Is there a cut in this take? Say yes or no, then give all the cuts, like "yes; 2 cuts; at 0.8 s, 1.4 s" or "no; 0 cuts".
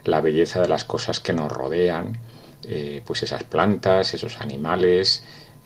no; 0 cuts